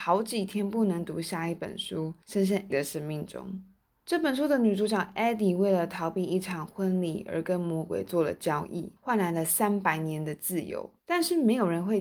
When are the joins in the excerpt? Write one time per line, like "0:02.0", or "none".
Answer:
0:02.2
0:02.7
0:03.9
0:09.0
0:11.0

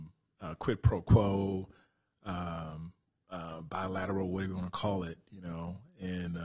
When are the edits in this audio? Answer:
none

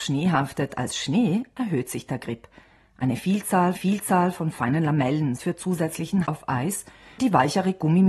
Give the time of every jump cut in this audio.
0:03.8
0:05.4
0:06.3
0:07.2

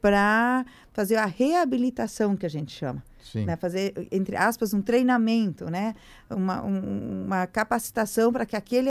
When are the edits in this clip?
none

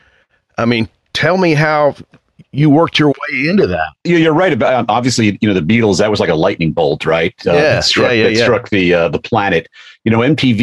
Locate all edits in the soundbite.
none

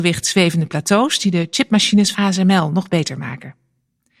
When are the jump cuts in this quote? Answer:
0:02.1

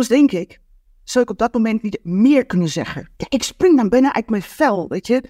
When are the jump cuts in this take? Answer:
0:03.1

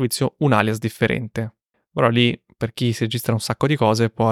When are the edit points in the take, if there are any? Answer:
0:01.7

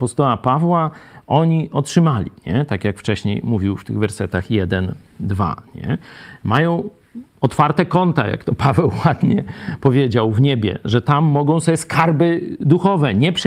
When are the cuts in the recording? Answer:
0:02.4

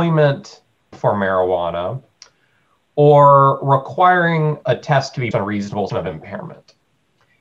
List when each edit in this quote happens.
0:00.9
0:04.6
0:05.3
0:05.9

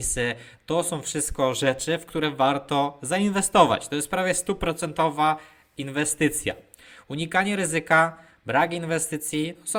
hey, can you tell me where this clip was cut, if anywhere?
none

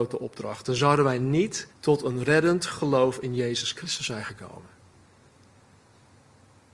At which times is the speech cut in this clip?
0:01.7

